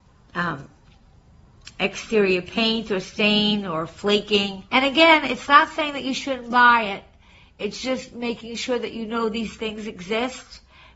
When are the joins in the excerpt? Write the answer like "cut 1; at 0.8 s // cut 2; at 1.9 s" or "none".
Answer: cut 1; at 4.7 s

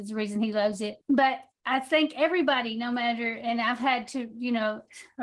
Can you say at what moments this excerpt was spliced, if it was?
cut 1; at 1.0 s

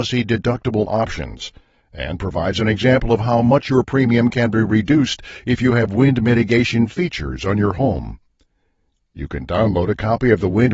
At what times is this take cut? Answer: none

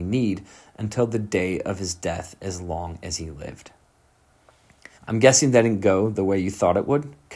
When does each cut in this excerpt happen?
cut 1; at 4.9 s

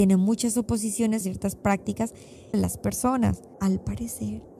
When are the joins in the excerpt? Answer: cut 1; at 1.2 s // cut 2; at 2.5 s // cut 3; at 3.5 s

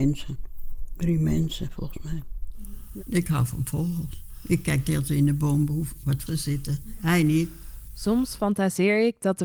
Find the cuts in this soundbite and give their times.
cut 1; at 6.3 s

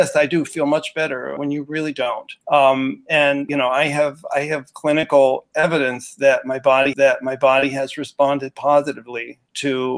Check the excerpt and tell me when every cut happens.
cut 1; at 1.4 s // cut 2; at 2.4 s // cut 3; at 3.5 s // cut 4; at 6.9 s

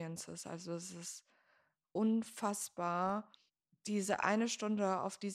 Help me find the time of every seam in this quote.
cut 1; at 3.5 s

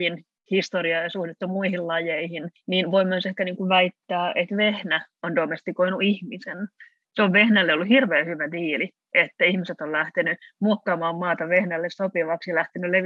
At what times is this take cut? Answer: none

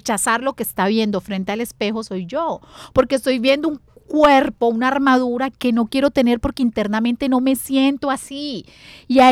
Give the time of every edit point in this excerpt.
none

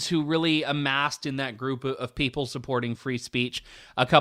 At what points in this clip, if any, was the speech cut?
none

